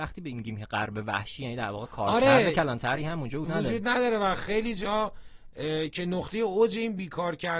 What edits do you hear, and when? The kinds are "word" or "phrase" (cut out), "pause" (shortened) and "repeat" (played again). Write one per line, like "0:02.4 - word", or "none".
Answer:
0:03.4 - word

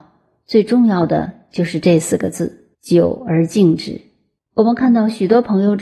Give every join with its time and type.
0:02.7 - pause
0:04.4 - pause

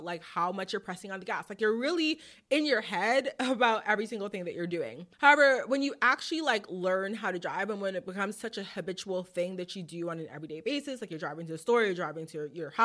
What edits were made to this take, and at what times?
none

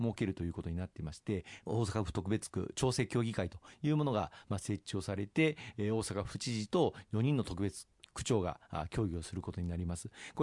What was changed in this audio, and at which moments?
none

